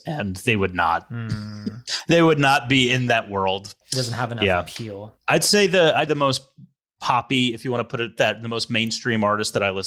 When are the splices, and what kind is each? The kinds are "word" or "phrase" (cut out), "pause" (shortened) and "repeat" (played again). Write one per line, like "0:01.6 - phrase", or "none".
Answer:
0:03.8 - word
0:05.2 - pause
0:06.1 - word